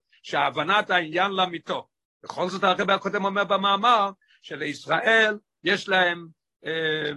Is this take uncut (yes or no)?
yes